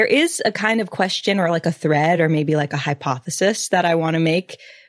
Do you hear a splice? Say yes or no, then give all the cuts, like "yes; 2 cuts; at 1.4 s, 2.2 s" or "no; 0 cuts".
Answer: no; 0 cuts